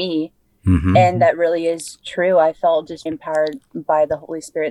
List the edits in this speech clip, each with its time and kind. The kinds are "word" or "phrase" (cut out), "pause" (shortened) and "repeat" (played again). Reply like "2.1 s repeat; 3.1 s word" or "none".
3.1 s word